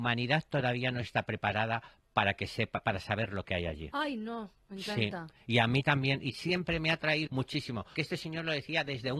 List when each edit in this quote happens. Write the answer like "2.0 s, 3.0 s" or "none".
7.3 s, 8.0 s